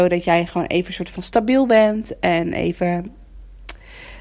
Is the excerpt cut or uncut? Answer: uncut